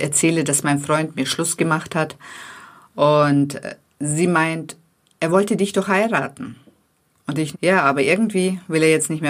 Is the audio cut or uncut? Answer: cut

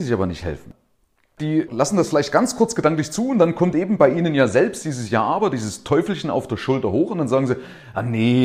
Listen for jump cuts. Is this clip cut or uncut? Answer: uncut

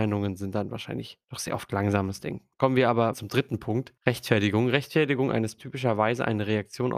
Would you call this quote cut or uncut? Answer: cut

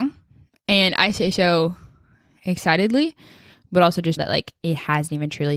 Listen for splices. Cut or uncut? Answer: cut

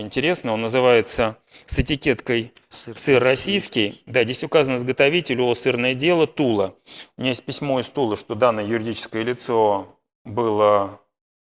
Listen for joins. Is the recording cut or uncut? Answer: uncut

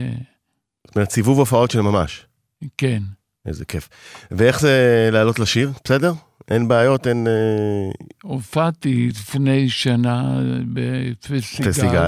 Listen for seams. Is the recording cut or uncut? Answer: uncut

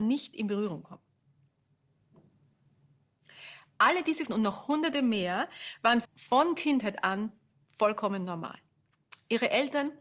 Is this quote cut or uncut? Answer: cut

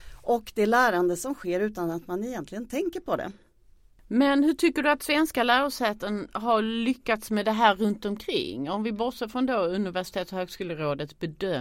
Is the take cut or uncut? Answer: uncut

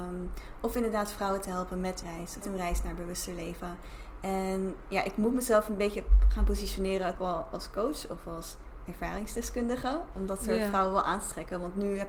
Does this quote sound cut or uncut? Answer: cut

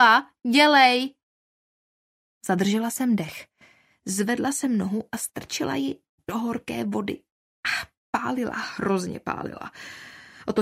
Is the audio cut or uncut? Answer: uncut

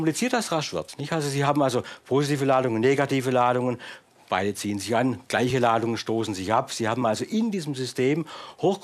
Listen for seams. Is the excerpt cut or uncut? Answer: uncut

